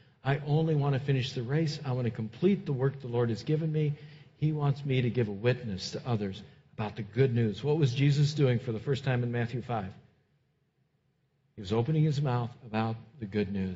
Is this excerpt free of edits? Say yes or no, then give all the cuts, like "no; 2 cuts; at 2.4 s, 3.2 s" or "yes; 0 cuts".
yes; 0 cuts